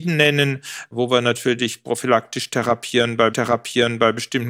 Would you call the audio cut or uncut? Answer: cut